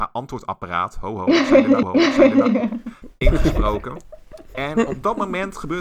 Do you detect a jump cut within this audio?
yes; 1 cut; at 1.8 s

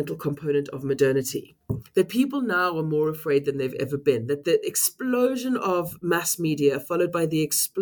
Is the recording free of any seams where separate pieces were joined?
yes; 0 cuts

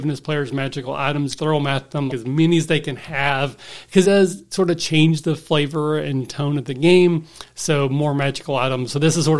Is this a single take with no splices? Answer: no; 3 cuts; at 1.4 s, 2.1 s, 4.0 s

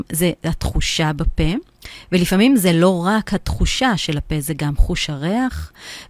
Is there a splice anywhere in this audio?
no; 0 cuts

